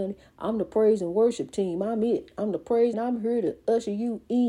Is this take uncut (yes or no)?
no